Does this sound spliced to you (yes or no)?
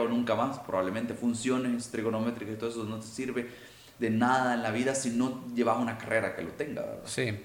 no